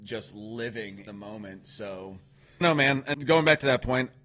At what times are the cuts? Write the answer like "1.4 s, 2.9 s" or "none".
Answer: 1.1 s, 2.6 s, 3.1 s

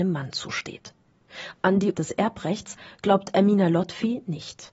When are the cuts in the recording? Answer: 1.9 s

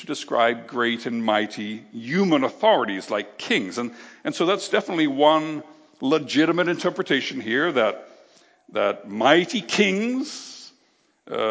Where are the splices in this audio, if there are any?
none

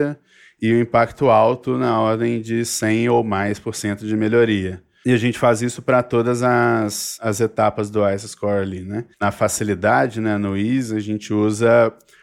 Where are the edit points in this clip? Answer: 9.1 s

